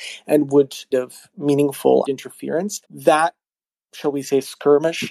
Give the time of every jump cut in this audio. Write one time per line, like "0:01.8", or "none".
0:00.9
0:02.0
0:02.8